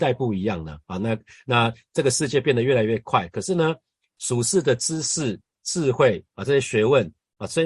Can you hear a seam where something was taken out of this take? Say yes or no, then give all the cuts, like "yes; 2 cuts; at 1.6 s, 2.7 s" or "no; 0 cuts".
no; 0 cuts